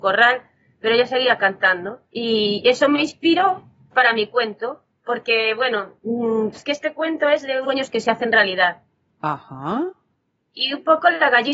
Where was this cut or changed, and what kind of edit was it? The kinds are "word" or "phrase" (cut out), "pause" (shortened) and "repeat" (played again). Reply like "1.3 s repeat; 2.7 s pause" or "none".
2.1 s pause; 3.9 s word; 6.5 s word; 7.6 s word